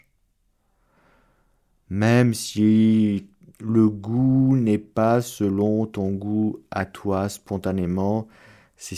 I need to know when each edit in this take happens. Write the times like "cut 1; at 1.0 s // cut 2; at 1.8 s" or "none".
cut 1; at 3.5 s

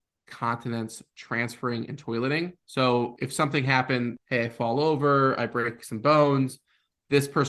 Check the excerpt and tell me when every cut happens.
cut 1; at 2.6 s

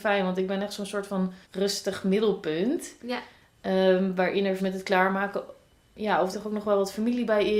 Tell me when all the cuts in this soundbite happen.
cut 1; at 1.4 s // cut 2; at 4.6 s // cut 3; at 6.3 s

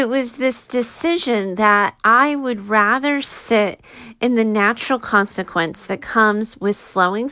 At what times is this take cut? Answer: none

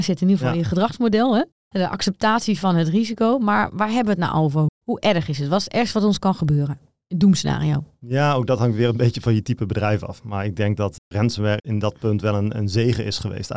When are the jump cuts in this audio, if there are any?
none

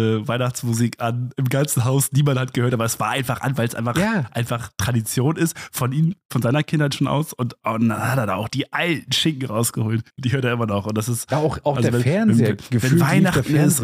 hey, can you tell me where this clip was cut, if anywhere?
cut 1; at 10.1 s

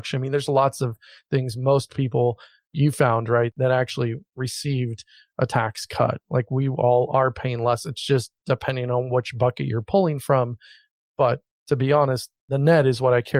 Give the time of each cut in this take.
none

